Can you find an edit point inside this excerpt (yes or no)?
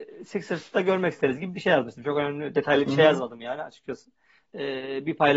no